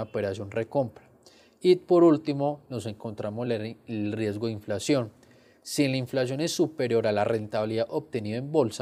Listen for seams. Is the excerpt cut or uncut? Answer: uncut